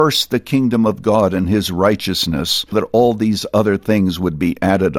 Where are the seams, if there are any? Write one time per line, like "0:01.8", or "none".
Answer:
0:02.7